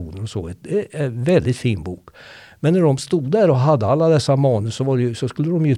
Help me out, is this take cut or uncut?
uncut